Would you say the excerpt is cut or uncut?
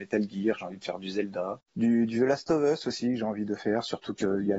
cut